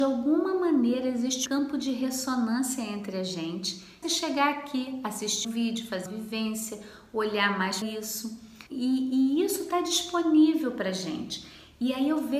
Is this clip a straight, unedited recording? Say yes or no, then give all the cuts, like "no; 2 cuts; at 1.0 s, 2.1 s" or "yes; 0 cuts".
no; 6 cuts; at 1.5 s, 4.0 s, 5.4 s, 6.1 s, 7.8 s, 8.7 s